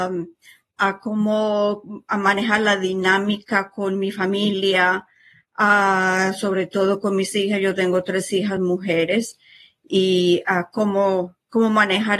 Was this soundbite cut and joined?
no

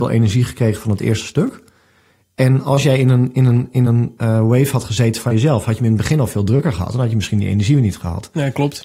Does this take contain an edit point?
no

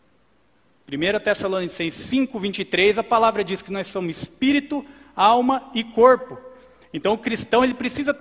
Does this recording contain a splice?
no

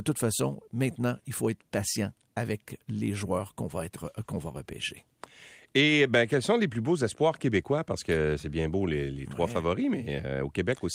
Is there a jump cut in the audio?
no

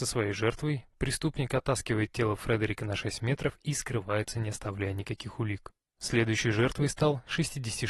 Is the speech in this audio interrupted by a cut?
no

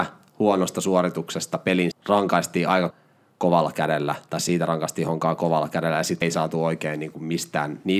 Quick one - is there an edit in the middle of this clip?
yes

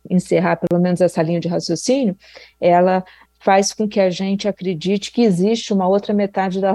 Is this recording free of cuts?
yes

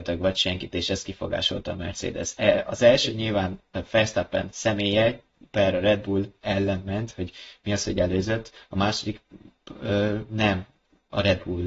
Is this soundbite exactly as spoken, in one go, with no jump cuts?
yes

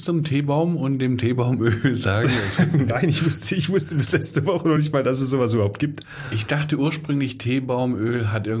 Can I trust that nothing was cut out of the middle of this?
yes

